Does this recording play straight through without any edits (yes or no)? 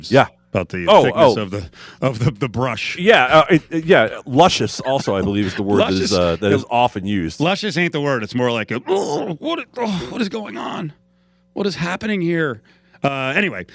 yes